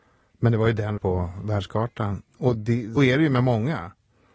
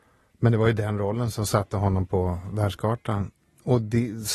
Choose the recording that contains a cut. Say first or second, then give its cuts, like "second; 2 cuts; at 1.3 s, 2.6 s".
first; 3 cuts; at 1.0 s, 2.3 s, 3.0 s